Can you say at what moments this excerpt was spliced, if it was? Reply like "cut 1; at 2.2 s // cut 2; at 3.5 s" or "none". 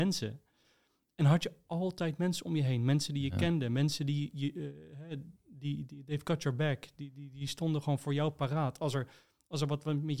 none